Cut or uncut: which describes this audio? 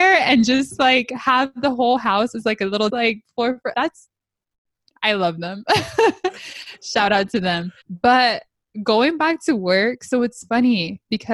cut